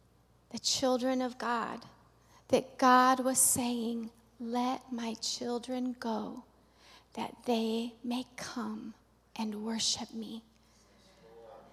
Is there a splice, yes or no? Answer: no